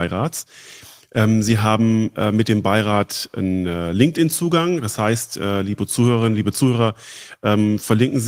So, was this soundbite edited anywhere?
no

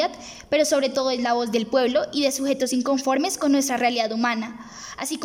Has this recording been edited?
no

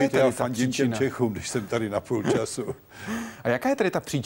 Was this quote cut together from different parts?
no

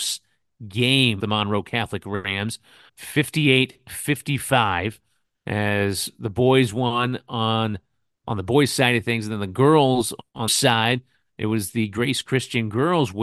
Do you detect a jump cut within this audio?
yes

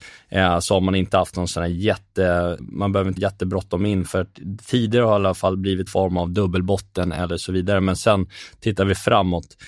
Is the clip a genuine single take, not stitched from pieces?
no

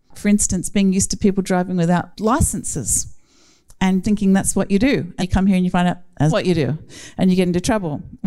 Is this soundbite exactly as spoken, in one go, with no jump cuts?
no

